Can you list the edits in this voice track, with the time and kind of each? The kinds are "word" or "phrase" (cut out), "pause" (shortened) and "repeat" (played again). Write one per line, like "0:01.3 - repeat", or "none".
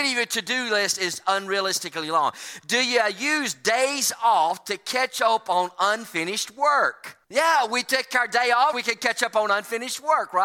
0:07.2 - pause
0:08.7 - word